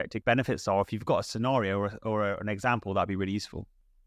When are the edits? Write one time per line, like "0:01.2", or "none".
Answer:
none